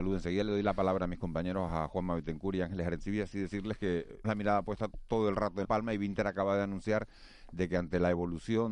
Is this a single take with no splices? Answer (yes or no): no